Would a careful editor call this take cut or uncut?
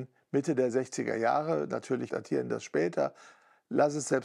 cut